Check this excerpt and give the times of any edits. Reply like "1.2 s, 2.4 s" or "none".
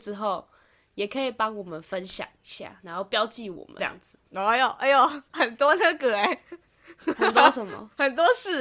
3.8 s, 4.2 s, 5.3 s